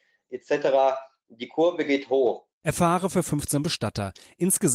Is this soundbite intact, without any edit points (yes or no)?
no